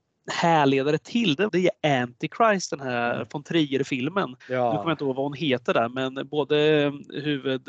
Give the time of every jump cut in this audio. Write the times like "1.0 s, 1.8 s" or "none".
1.5 s, 4.4 s